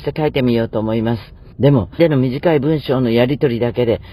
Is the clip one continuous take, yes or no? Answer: no